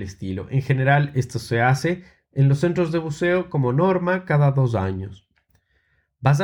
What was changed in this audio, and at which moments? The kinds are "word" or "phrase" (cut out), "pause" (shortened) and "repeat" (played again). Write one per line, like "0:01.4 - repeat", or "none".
none